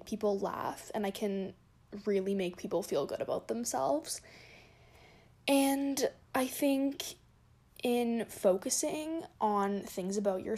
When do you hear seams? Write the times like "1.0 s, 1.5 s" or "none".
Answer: none